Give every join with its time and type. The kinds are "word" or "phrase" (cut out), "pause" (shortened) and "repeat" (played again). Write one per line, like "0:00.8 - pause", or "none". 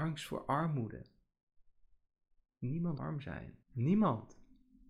0:03.0 - word
0:03.6 - pause